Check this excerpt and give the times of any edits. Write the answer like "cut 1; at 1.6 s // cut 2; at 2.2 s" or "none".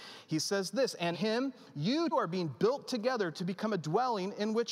cut 1; at 1.1 s // cut 2; at 2.1 s